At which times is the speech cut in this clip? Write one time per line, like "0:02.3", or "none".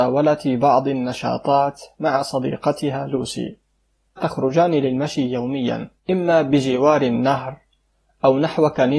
0:04.2
0:06.0